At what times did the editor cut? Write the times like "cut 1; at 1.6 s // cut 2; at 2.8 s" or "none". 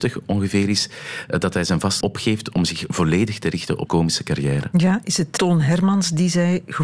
cut 1; at 2.0 s // cut 2; at 3.9 s // cut 3; at 5.4 s